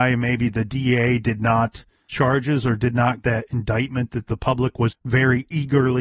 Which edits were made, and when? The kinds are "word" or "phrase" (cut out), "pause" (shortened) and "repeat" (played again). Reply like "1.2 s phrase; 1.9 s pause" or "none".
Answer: 2.1 s word; 3.2 s word; 4.9 s word